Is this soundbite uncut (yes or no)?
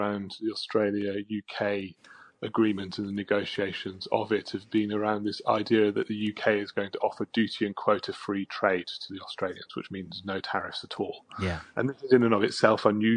yes